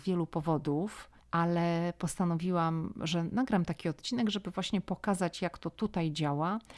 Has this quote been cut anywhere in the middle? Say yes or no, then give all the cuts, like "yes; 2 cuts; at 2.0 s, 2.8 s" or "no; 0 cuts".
yes; 1 cut; at 1.2 s